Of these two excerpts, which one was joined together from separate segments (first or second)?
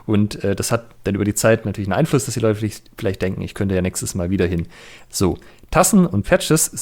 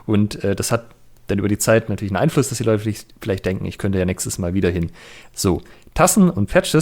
first